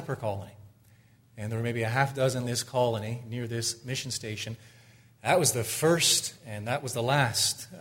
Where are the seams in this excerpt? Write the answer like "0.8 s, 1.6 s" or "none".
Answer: 2.4 s